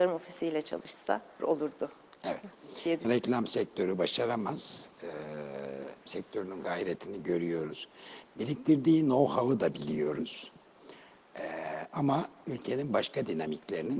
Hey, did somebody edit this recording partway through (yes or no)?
yes